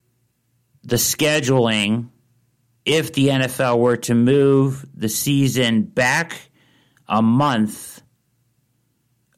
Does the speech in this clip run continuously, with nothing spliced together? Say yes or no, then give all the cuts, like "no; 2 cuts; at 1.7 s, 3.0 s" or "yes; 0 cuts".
yes; 0 cuts